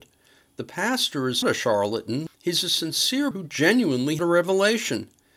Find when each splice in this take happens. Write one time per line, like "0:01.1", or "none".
0:01.4
0:02.3
0:03.3
0:04.2